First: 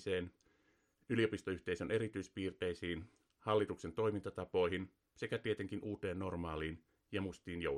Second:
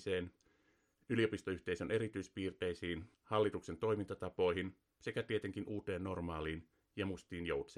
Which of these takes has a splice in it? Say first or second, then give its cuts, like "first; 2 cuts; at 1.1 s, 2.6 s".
second; 1 cut; at 3.1 s